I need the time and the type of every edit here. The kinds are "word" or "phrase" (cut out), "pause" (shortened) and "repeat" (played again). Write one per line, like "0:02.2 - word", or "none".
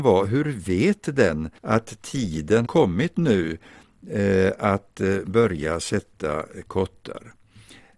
0:01.6 - pause
0:02.6 - word